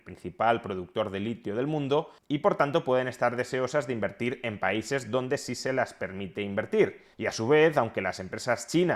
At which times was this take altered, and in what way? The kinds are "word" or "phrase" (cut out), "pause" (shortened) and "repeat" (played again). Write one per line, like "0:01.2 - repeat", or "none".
0:07.1 - pause